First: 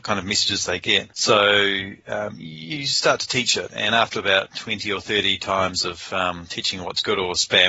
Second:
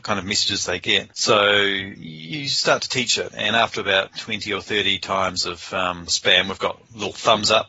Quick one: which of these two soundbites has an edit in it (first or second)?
second